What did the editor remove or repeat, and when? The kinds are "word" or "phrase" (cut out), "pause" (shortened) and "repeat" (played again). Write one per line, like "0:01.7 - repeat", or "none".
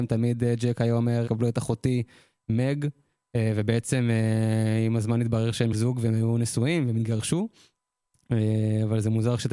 0:01.2 - word
0:05.7 - word